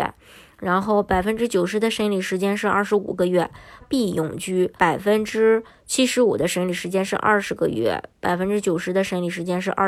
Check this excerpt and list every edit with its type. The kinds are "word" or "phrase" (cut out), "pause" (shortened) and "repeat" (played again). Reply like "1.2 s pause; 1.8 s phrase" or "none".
3.8 s phrase; 4.8 s pause